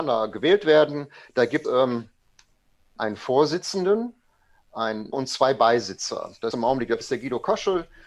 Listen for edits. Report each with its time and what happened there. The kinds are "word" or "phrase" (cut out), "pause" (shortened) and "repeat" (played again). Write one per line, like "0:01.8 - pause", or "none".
0:01.6 - word
0:03.0 - word
0:05.1 - word
0:06.5 - word
0:07.0 - word

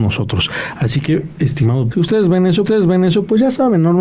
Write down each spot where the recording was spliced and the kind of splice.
0:01.9 - word
0:02.6 - repeat

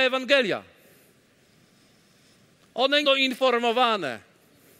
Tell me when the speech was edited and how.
0:03.0 - phrase

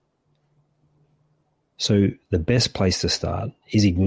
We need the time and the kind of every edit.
none

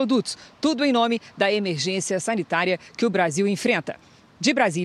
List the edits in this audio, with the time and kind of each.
none

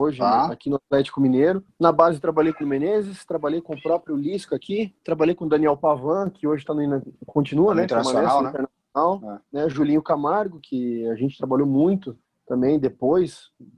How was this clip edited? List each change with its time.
0:02.6 - word
0:09.4 - pause
0:12.2 - pause

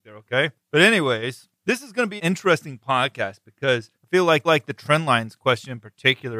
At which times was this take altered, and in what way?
0:01.6 - pause
0:02.2 - word
0:04.0 - pause
0:04.4 - repeat

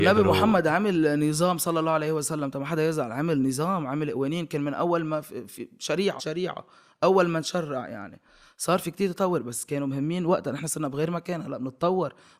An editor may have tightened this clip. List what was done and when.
0:06.2 - word

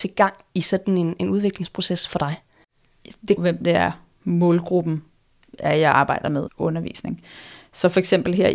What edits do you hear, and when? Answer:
0:03.4 - phrase
0:06.5 - phrase

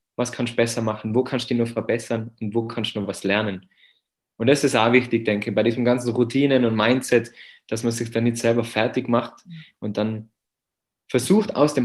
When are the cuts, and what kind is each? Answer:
none

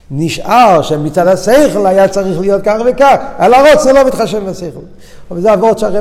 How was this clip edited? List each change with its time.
none

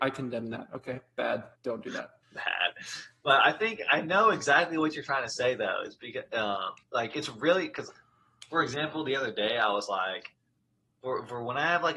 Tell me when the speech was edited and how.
0:01.6 - pause
0:02.2 - pause
0:06.8 - pause

